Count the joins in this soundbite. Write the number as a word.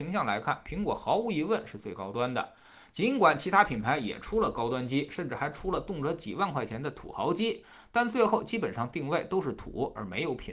zero